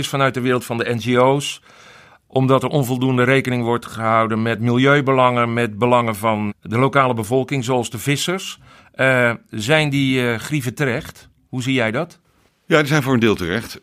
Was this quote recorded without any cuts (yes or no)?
no